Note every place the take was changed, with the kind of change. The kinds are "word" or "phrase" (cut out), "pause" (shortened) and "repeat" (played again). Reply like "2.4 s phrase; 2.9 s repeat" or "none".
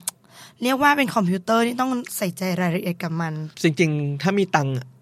3.5 s pause